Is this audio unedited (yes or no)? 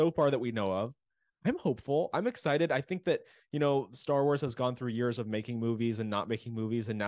yes